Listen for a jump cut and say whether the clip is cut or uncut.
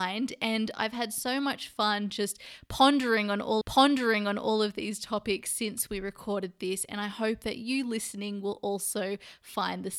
cut